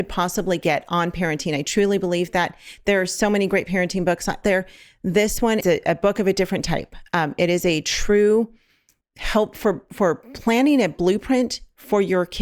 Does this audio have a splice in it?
yes; 3 cuts; at 4.4 s, 5.6 s, 9.0 s

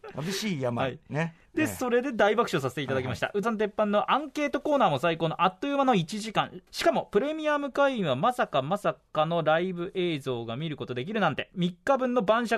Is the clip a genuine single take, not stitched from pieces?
no; 2 cuts; at 3.4 s, 6.7 s

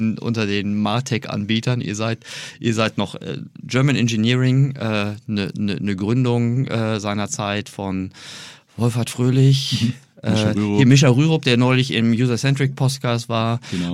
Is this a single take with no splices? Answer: yes; 0 cuts

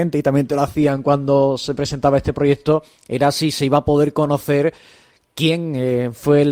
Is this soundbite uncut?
yes; 0 cuts

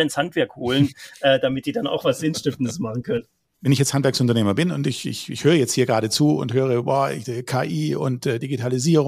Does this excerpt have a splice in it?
no; 0 cuts

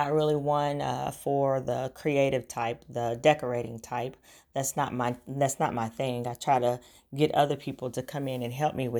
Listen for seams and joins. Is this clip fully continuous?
yes; 0 cuts

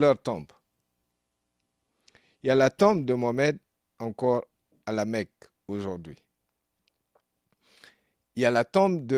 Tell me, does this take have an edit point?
no; 0 cuts

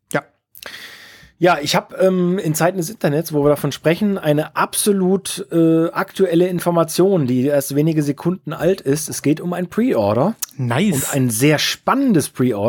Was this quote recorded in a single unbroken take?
yes; 0 cuts

